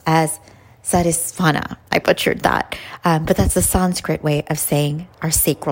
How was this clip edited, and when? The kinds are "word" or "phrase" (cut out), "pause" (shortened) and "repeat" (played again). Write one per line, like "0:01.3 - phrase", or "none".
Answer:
0:02.0 - word